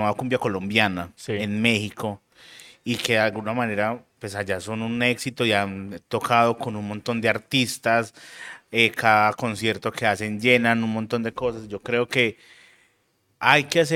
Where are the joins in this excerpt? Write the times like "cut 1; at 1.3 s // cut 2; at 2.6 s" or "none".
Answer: none